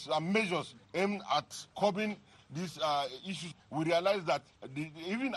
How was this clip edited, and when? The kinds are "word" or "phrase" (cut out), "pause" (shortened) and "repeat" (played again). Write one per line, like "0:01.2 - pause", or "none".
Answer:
0:01.7 - pause
0:03.6 - pause